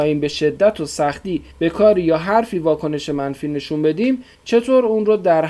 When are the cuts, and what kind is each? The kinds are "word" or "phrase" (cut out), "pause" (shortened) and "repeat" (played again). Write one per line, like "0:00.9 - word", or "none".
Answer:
0:01.5 - pause
0:04.3 - pause